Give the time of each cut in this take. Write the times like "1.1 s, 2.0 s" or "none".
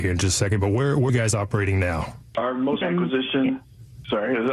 1.1 s, 2.8 s